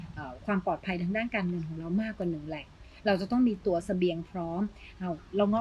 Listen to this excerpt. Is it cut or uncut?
uncut